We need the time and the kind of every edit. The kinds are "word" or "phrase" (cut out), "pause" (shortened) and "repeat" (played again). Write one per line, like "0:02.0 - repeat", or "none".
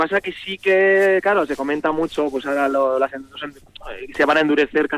none